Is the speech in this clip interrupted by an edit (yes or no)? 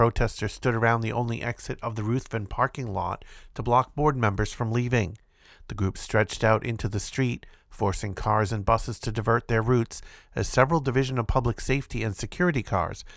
no